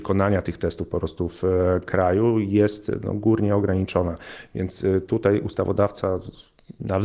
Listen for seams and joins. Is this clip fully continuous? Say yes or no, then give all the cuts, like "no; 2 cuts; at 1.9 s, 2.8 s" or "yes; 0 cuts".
yes; 0 cuts